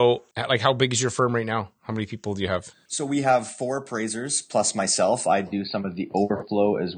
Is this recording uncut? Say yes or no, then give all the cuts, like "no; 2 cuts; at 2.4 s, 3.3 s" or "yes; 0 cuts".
yes; 0 cuts